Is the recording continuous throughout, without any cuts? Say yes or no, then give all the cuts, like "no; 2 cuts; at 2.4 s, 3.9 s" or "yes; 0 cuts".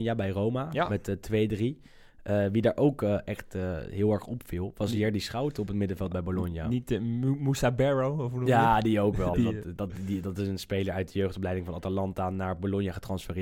no; 1 cut; at 9.3 s